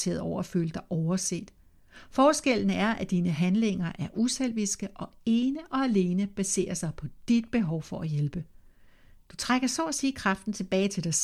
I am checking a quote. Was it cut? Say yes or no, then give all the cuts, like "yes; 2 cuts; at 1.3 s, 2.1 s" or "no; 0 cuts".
no; 0 cuts